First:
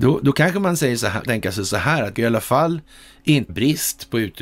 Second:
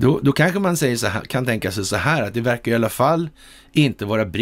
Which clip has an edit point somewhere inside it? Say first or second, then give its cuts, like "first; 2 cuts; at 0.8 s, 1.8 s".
first; 3 cuts; at 1.3 s, 2.1 s, 3.5 s